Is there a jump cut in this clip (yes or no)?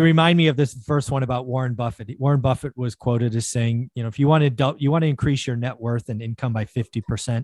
no